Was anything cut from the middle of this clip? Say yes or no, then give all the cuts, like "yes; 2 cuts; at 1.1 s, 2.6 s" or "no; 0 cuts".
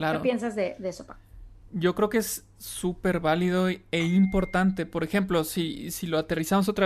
no; 0 cuts